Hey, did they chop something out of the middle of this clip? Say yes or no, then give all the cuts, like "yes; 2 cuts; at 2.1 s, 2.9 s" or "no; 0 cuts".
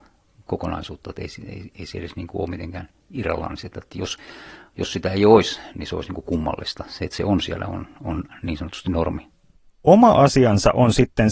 no; 0 cuts